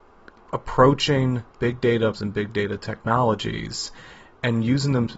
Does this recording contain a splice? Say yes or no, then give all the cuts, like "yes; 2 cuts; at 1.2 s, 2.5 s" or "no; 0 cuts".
yes; 2 cuts; at 1.5 s, 2.1 s